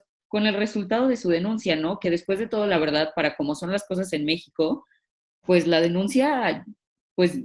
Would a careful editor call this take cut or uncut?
uncut